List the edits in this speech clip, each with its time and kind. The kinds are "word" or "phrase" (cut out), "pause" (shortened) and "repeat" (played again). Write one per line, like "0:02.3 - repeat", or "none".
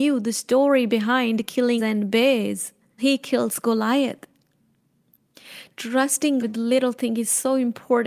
0:01.8 - word
0:03.0 - word
0:06.4 - word